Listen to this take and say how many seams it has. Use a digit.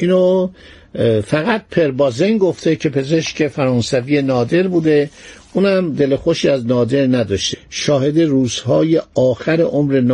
1